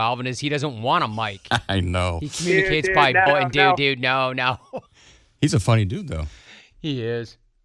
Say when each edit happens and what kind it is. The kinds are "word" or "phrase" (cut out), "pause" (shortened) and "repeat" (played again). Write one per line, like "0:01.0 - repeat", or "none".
0:03.3 - word
0:04.9 - pause